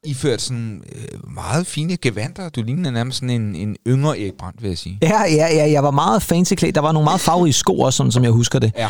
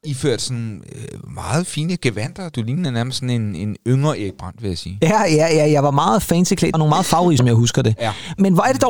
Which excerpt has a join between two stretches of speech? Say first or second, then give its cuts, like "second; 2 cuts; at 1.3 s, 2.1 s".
second; 2 cuts; at 6.7 s, 7.4 s